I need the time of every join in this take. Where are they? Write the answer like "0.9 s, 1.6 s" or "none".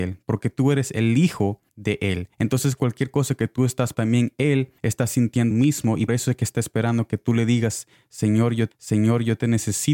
1.7 s, 2.3 s, 3.9 s, 4.8 s, 5.5 s, 6.1 s, 8.7 s